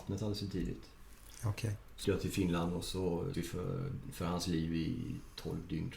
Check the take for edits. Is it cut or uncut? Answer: cut